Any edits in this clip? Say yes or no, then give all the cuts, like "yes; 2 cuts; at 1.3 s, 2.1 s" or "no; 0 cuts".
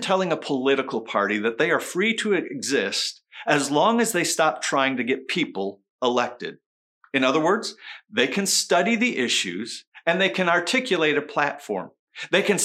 no; 0 cuts